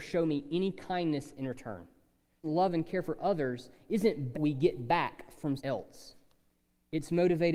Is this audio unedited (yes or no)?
no